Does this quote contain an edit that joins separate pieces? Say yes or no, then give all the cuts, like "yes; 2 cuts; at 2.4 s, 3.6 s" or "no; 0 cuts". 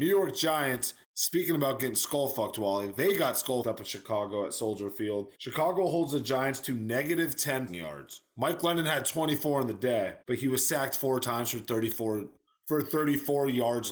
yes; 5 cuts; at 1.0 s, 3.6 s, 5.3 s, 7.7 s, 10.2 s